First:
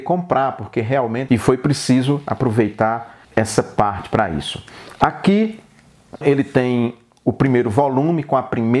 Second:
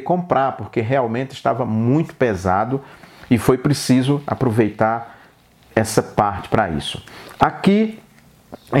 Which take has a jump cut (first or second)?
first